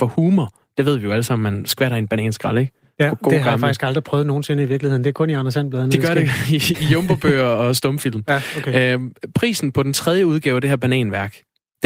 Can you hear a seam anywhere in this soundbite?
no; 0 cuts

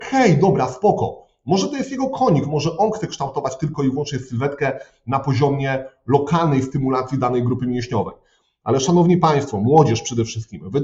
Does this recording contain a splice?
no; 0 cuts

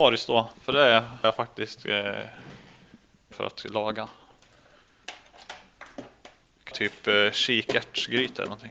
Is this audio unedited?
no; 3 cuts; at 1.2 s, 3.3 s, 6.7 s

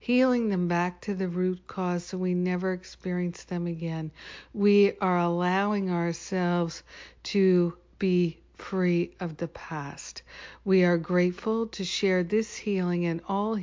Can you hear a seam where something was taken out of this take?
no; 0 cuts

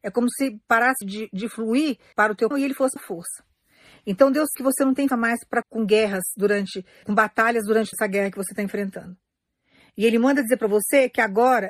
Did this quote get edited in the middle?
yes; 9 cuts; at 1.0 s, 2.1 s, 2.5 s, 3.0 s, 4.5 s, 5.1 s, 5.6 s, 7.0 s, 7.9 s

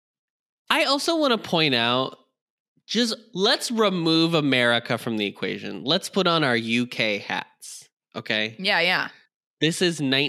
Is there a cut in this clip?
no; 0 cuts

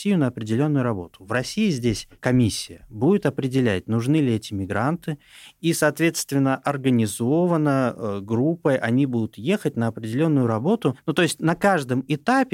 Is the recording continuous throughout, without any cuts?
yes; 0 cuts

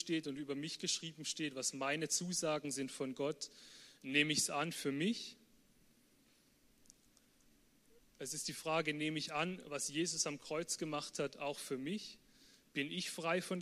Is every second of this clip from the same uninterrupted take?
yes; 0 cuts

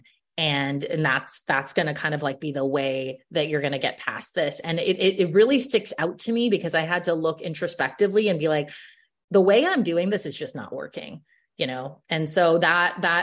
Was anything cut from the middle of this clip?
no; 0 cuts

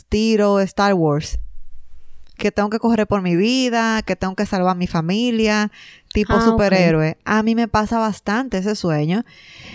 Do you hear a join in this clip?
no; 0 cuts

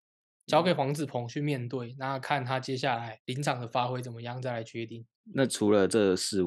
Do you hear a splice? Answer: no; 0 cuts

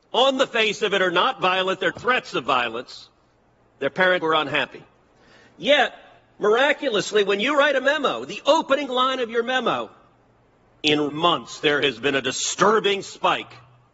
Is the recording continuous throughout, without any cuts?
no; 3 cuts; at 1.9 s, 4.2 s, 11.1 s

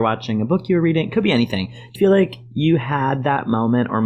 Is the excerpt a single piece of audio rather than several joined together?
no; 1 cut; at 2.0 s

